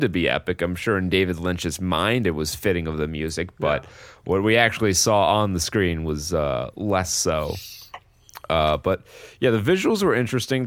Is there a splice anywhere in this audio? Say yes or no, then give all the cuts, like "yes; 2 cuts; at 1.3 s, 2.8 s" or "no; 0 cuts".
no; 0 cuts